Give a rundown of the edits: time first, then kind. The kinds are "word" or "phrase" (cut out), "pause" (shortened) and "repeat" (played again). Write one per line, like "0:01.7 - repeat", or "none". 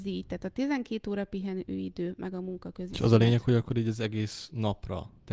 none